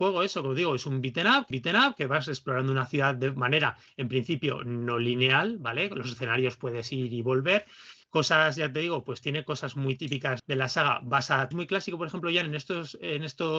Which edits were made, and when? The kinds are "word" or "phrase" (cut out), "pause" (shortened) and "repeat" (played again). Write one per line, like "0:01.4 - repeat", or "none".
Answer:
0:01.5 - repeat
0:08.0 - pause
0:10.4 - word
0:11.5 - phrase